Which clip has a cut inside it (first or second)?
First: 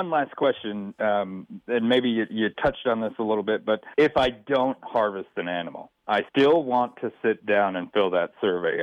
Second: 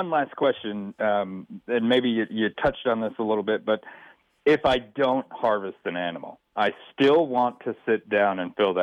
first